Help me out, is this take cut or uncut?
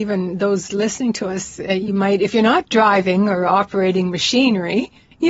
uncut